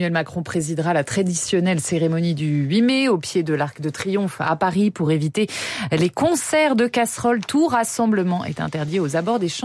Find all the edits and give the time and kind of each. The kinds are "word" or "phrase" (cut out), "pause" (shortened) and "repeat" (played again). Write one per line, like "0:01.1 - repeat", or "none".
none